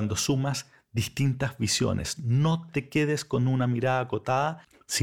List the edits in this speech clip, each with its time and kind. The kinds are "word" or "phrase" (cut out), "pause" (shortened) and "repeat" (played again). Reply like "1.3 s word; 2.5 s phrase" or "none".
none

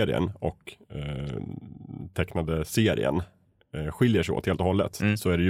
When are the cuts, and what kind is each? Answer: none

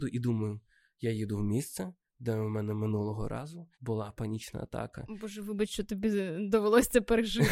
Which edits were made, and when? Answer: 3.7 s pause

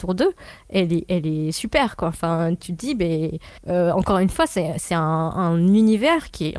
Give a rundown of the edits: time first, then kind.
3.6 s pause

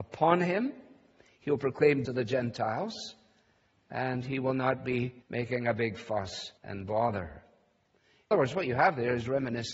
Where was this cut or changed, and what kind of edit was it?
2.1 s word; 5.2 s pause; 6.6 s pause; 8.3 s word

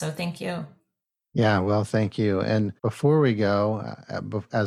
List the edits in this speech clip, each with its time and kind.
2.8 s pause

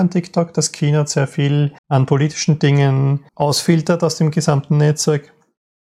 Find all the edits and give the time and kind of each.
1.8 s pause; 3.3 s pause

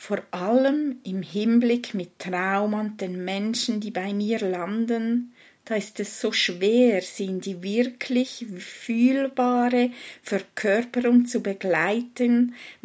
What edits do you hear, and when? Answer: none

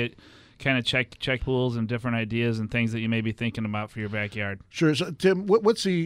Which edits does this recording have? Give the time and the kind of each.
1.4 s word

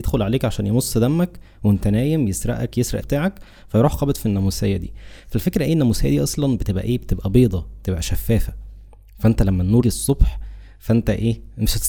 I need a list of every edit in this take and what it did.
3.0 s word; 9.8 s word

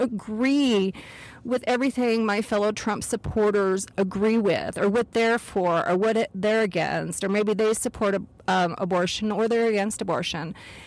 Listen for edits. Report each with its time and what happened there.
none

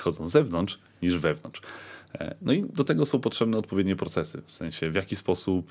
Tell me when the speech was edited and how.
none

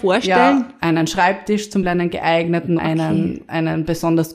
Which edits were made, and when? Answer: 1.8 s word; 2.8 s word

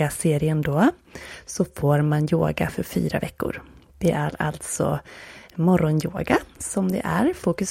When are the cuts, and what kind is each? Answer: none

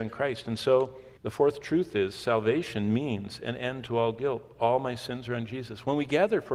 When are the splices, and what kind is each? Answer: 1.2 s pause

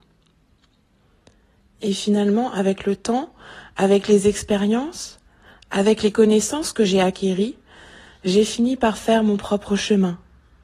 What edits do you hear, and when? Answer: none

